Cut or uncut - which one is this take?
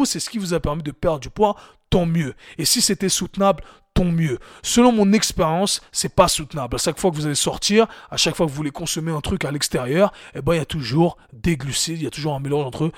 uncut